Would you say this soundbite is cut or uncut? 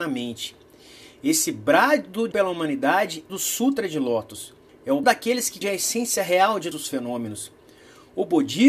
cut